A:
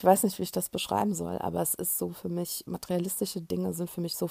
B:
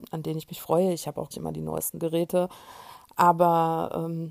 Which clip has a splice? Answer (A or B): B